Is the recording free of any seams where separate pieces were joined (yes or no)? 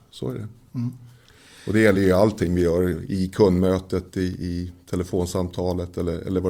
yes